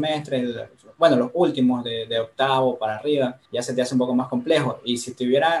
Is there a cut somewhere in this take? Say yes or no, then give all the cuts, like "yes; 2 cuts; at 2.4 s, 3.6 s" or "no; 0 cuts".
yes; 1 cut; at 3.5 s